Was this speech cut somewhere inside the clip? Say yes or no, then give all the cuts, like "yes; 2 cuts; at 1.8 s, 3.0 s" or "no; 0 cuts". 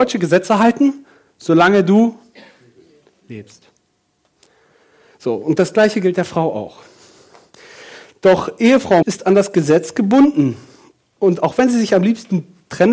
yes; 1 cut; at 9.0 s